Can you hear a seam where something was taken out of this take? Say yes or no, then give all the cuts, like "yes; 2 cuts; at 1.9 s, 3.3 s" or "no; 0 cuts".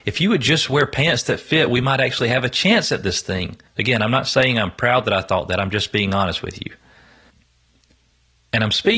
yes; 1 cut; at 3.7 s